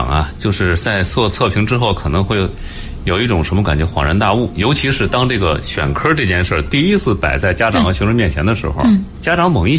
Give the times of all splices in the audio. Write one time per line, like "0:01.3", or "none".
none